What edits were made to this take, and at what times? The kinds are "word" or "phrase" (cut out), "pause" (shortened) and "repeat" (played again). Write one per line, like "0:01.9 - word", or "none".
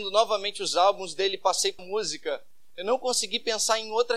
0:01.8 - word

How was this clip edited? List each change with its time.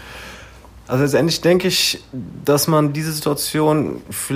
none

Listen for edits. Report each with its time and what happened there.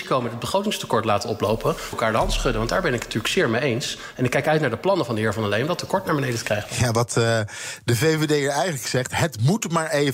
0:01.9 - phrase

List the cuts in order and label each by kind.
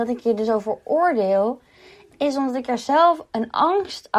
none

